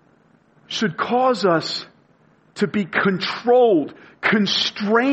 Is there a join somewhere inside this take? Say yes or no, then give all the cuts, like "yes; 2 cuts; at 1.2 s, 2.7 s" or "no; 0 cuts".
no; 0 cuts